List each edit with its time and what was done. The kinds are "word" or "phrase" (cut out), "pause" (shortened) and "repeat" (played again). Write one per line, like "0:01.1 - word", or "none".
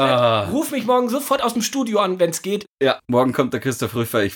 none